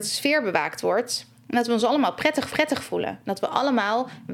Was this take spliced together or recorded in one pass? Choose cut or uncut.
cut